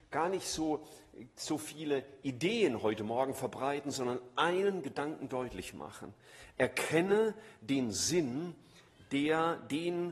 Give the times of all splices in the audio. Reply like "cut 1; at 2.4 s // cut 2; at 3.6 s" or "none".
none